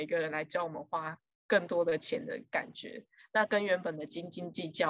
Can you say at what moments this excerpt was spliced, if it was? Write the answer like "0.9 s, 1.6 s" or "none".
none